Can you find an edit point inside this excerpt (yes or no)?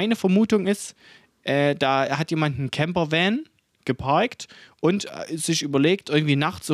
no